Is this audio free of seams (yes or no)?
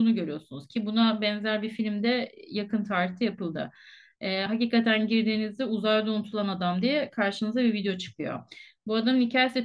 yes